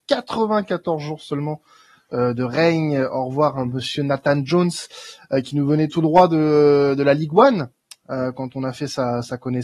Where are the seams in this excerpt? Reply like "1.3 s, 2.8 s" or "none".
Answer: none